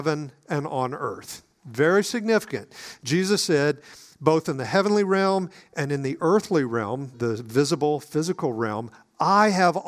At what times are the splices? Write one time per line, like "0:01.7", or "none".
0:07.1

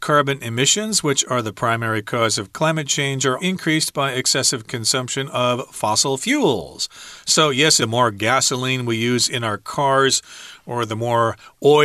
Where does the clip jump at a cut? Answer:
0:03.4
0:07.8

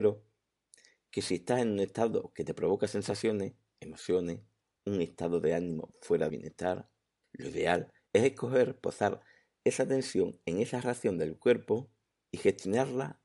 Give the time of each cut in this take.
0:06.3

